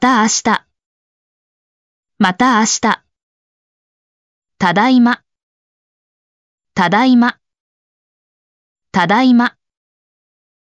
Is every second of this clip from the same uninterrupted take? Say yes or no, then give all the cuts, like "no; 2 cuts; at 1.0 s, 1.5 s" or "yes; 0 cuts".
yes; 0 cuts